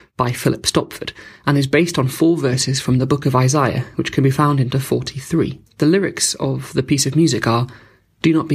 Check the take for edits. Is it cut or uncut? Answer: cut